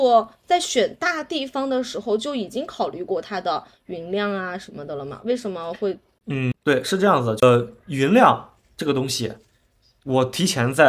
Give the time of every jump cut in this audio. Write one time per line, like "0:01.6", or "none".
0:06.6